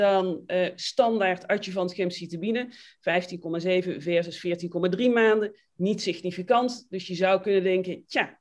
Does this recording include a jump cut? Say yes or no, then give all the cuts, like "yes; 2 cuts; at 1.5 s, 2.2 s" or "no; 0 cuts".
no; 0 cuts